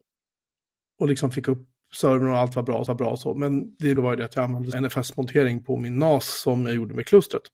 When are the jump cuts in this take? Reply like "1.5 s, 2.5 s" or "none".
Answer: 2.9 s, 4.0 s, 4.7 s